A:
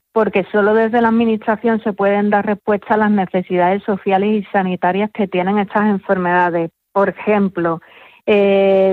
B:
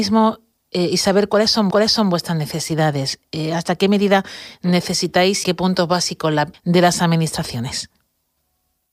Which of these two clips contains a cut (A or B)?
B